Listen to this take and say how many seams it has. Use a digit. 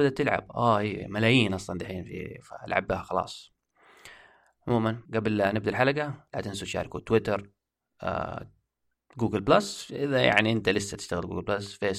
1